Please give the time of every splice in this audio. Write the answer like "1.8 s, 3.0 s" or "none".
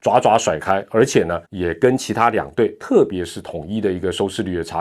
1.4 s